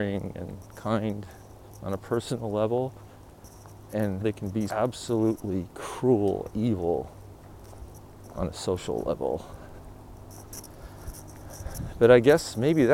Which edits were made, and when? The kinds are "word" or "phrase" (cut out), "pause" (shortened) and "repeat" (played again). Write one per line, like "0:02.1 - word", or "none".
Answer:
0:04.2 - word
0:04.7 - word
0:06.5 - word